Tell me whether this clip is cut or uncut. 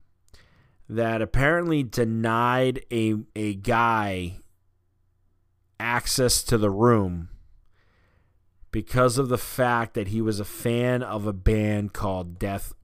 cut